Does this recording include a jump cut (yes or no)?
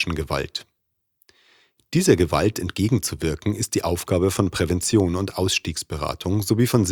no